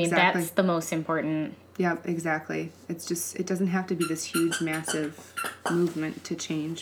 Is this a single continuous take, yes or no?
yes